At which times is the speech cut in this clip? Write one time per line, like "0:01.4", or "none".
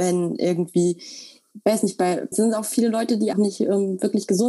0:02.3
0:03.3